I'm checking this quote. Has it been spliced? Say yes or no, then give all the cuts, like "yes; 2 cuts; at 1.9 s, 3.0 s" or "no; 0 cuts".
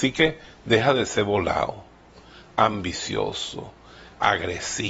no; 0 cuts